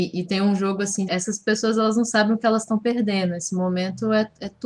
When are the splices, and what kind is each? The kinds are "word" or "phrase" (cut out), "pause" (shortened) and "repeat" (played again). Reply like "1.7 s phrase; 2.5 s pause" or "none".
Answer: 1.1 s word

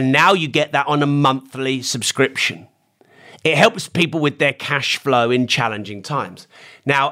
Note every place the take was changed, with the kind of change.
3.0 s pause

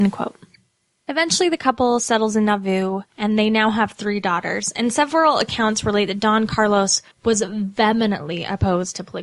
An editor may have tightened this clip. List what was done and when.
3.1 s pause; 7.1 s pause

